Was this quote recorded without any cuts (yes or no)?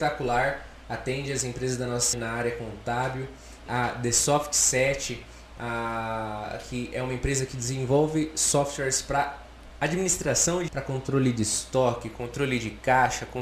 no